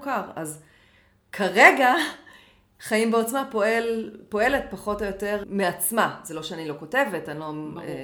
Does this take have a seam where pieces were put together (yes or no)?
yes